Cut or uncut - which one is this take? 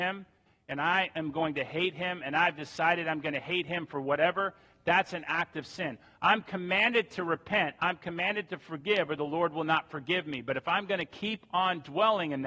uncut